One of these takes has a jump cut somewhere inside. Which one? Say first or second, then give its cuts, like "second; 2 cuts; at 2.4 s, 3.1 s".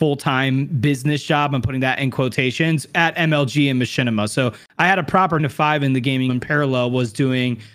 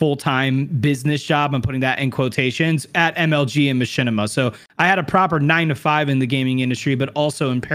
first; 2 cuts; at 5.4 s, 6.3 s